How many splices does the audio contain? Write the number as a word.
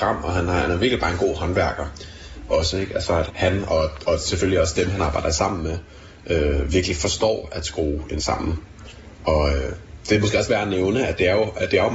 two